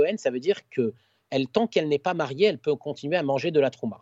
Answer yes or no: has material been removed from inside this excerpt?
no